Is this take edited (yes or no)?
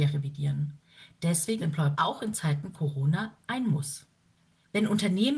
yes